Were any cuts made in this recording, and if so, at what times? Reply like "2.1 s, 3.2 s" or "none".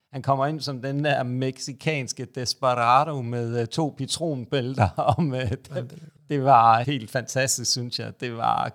6.2 s, 6.8 s